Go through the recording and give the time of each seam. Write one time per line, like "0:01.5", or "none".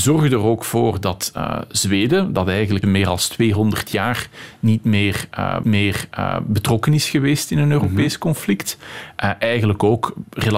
0:02.8
0:05.6